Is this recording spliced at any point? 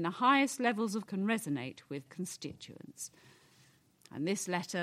yes; 2 cuts; at 1.1 s, 2.1 s

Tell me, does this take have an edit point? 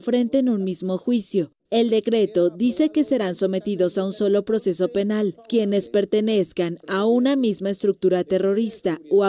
yes; 1 cut; at 1.6 s

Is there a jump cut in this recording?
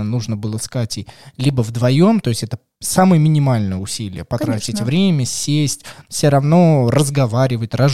no; 0 cuts

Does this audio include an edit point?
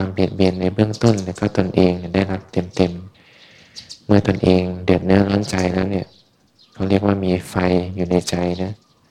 yes; 1 cut; at 3.1 s

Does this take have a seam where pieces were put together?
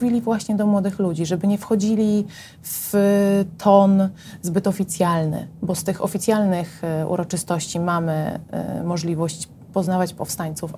no; 0 cuts

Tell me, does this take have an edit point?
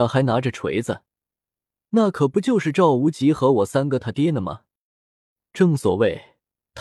no; 0 cuts

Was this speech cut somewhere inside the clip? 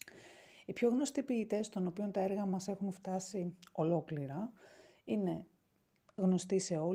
no; 0 cuts

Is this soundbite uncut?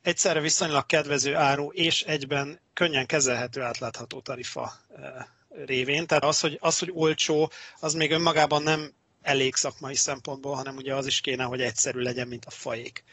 no; 1 cut; at 6.2 s

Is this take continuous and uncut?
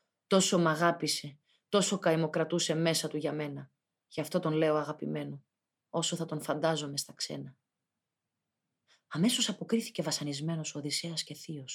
yes; 0 cuts

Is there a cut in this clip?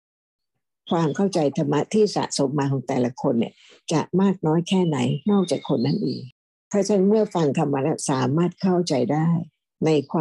no; 0 cuts

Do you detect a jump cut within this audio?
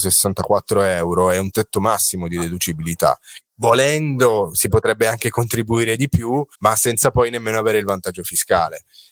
yes; 2 cuts; at 3.4 s, 6.5 s

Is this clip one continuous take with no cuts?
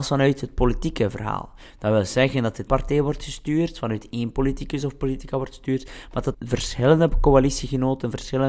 no; 2 cuts; at 2.7 s, 6.3 s

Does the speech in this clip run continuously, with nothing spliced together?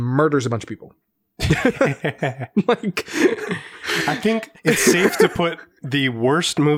no; 1 cut; at 4.6 s

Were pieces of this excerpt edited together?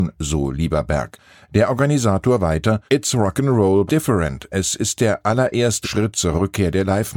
yes; 3 cuts; at 2.9 s, 3.9 s, 5.8 s

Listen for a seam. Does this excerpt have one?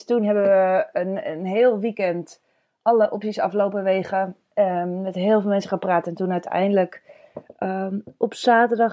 no; 0 cuts

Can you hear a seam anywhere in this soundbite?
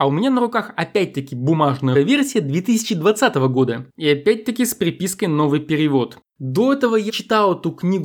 yes; 2 cuts; at 1.9 s, 7.1 s

